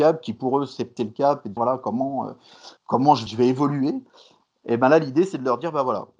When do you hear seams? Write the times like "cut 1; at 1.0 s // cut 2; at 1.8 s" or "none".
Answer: cut 1; at 1.0 s // cut 2; at 1.6 s // cut 3; at 2.8 s // cut 4; at 3.3 s